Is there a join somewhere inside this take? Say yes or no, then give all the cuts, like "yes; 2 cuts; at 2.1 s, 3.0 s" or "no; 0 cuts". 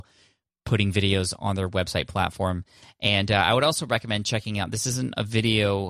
no; 0 cuts